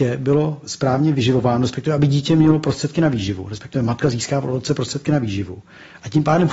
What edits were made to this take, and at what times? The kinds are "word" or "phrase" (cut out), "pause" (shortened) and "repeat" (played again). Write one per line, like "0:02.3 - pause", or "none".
none